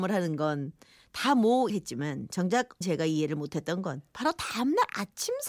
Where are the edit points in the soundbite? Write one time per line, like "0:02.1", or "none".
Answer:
0:01.7
0:02.8
0:04.1

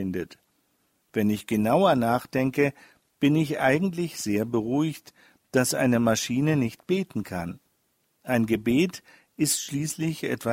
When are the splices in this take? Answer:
none

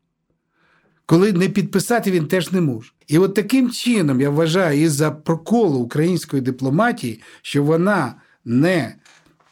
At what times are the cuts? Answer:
0:03.0

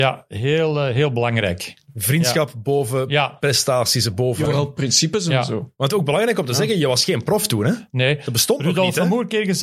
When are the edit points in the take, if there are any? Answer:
0:04.5

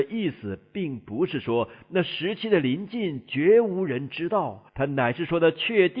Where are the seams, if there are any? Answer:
0:04.7

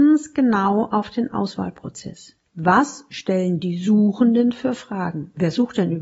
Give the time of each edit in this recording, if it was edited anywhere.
0:02.5

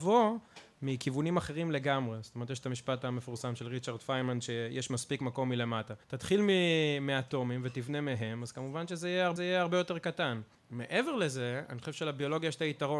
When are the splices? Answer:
0:06.0
0:09.4

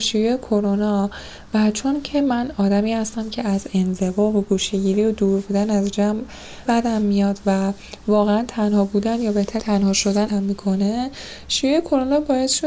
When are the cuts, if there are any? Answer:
0:06.7
0:09.6
0:10.3

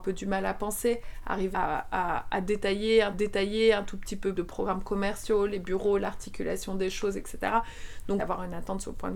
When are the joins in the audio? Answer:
0:01.5
0:03.1
0:04.3
0:08.2

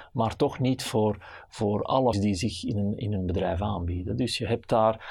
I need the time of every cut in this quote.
0:02.1

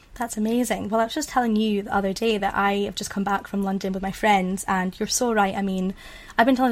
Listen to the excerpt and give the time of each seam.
none

